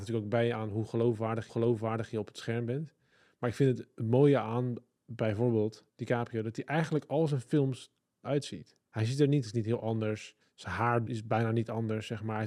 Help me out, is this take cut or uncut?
cut